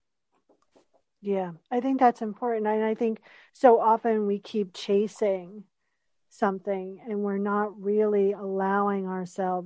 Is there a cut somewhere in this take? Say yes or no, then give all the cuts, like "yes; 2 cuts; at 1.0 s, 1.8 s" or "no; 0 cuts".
no; 0 cuts